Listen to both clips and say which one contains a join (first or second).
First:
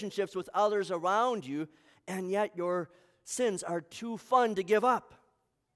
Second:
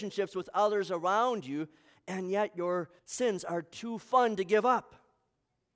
second